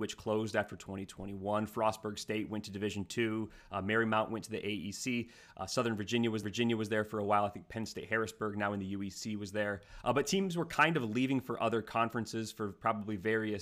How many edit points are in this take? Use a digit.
1